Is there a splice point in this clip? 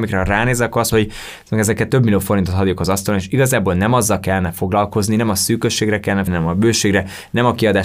yes; 2 cuts; at 0.9 s, 6.3 s

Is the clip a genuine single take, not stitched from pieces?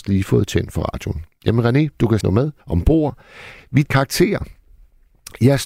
no; 3 cuts; at 2.2 s, 2.6 s, 3.8 s

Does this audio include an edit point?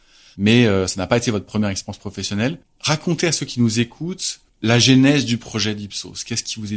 yes; 2 cuts; at 2.6 s, 4.5 s

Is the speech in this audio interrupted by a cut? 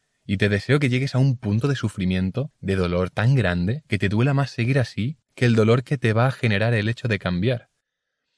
yes; 1 cut; at 5.3 s

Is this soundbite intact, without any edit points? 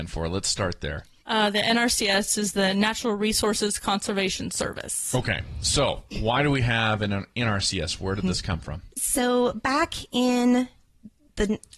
no; 3 cuts; at 1.1 s, 6.1 s, 8.9 s

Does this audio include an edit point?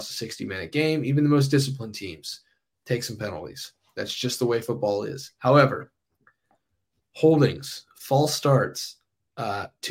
no; 0 cuts

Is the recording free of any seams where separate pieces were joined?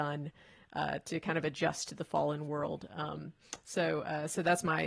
yes; 0 cuts

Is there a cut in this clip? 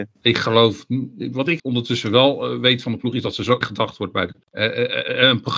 yes; 2 cuts; at 1.6 s, 3.6 s

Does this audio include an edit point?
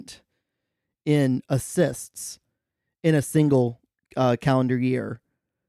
no; 0 cuts

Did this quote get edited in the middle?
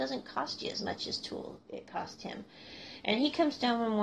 no; 0 cuts

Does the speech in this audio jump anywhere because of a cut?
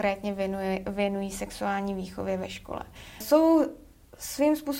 yes; 1 cut; at 3.0 s

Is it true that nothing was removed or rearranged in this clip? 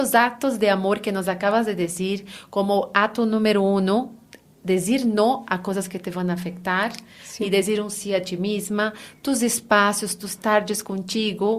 yes; 0 cuts

